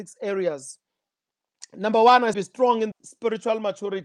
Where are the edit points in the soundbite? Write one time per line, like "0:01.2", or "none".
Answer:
0:02.3
0:02.9